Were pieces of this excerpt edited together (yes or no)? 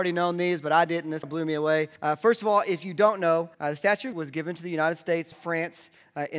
yes